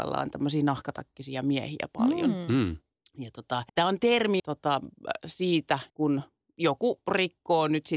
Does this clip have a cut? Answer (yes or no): yes